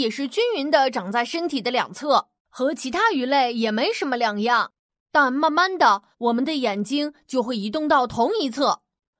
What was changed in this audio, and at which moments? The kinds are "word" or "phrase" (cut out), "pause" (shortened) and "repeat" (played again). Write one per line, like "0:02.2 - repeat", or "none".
0:02.4 - pause
0:06.1 - pause